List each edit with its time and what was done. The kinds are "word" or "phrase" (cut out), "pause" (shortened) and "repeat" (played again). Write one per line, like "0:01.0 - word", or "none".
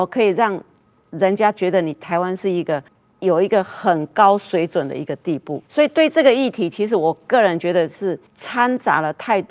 0:02.9 - pause
0:05.7 - pause
0:08.3 - pause